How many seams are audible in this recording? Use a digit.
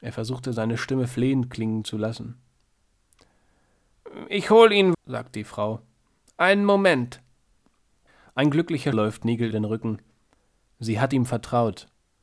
3